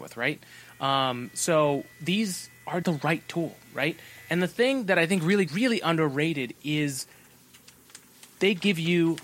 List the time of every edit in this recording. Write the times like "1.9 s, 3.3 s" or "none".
1.9 s, 2.8 s, 5.5 s